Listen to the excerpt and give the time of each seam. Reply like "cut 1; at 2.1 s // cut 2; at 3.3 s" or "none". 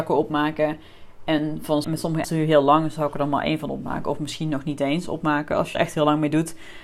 cut 1; at 1.8 s // cut 2; at 2.2 s // cut 3; at 5.7 s